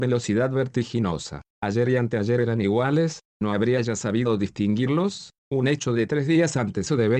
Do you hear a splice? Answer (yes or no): no